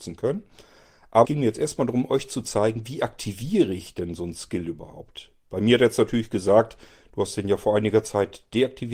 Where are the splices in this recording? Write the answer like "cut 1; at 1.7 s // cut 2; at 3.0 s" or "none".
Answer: cut 1; at 1.2 s